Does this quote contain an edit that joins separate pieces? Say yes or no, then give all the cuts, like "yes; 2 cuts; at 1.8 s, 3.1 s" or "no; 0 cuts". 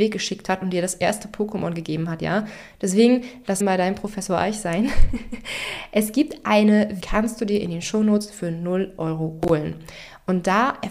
yes; 2 cuts; at 3.6 s, 7.0 s